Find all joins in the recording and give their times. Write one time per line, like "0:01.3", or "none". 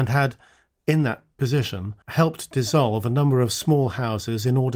0:02.0